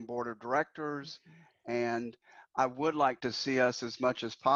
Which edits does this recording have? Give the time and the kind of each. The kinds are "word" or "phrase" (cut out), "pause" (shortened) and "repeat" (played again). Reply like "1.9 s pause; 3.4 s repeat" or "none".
none

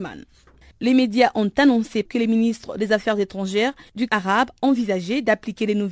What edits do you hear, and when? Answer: 2.1 s word; 4.1 s word

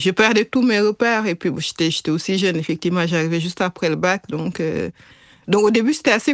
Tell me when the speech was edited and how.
none

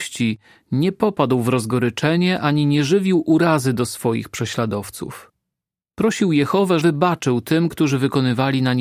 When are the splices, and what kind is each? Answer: 6.8 s word

